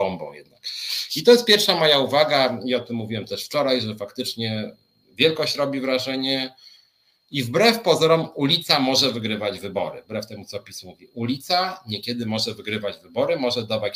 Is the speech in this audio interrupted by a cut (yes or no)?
no